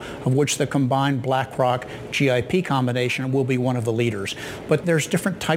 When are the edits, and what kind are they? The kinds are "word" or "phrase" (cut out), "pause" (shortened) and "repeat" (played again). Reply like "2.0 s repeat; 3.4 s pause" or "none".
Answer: none

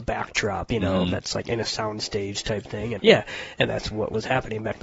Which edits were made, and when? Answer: 3.0 s word

